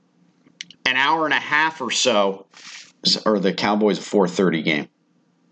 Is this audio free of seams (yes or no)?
yes